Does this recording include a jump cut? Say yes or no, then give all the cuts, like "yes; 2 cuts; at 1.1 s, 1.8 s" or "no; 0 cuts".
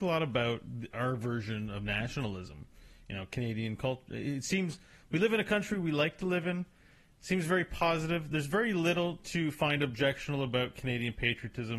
no; 0 cuts